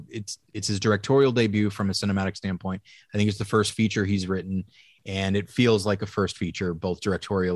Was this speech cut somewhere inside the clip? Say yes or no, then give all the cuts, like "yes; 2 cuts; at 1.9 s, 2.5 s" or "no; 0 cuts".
no; 0 cuts